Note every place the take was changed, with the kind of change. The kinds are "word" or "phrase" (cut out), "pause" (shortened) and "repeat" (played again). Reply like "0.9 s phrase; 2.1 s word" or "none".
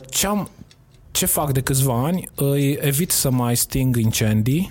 none